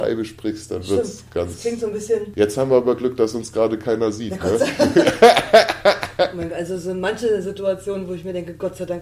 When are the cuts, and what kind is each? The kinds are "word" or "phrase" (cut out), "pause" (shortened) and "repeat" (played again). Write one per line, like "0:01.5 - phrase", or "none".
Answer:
none